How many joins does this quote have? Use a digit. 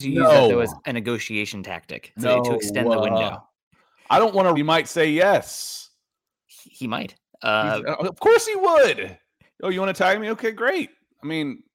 2